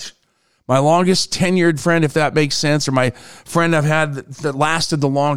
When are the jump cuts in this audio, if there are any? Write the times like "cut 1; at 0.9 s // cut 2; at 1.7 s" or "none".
none